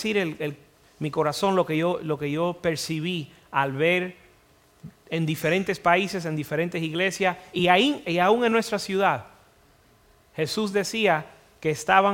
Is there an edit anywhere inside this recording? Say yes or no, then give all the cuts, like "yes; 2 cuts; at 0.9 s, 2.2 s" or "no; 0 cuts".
no; 0 cuts